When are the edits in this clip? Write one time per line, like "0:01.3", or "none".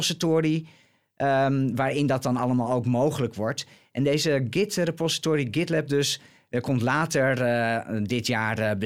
none

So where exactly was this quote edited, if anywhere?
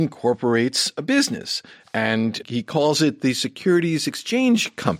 0:02.4

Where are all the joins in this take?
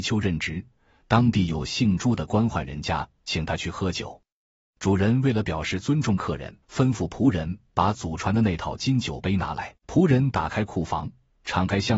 0:06.6
0:09.8

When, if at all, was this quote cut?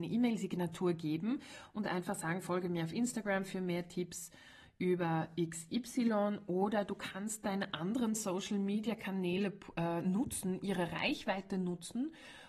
none

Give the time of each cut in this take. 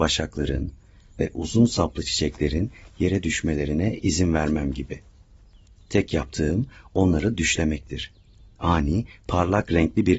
none

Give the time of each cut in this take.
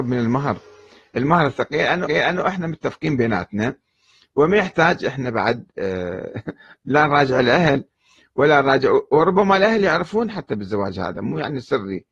0:02.1

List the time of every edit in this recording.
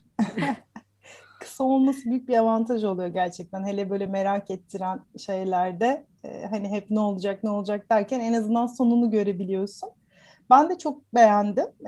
none

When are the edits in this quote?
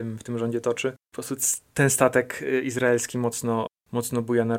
none

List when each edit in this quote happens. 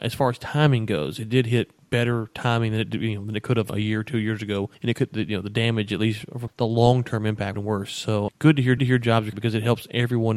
0:03.7
0:04.7
0:06.5
0:07.5
0:08.3
0:08.8
0:09.3

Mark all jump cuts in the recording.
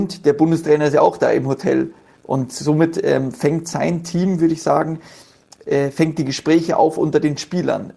none

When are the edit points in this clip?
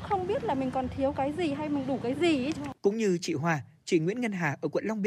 0:02.8

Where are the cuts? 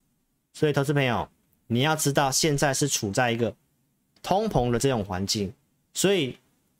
none

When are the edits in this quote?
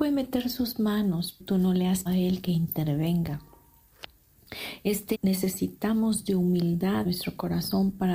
0:01.4
0:02.1
0:05.1
0:07.0

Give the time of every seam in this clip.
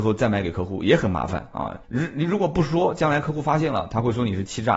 0:01.8

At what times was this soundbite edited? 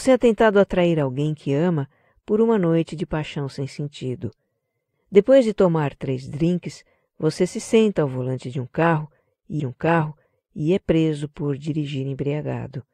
0:09.6

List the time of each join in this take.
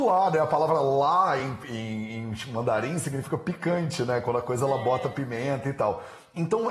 none

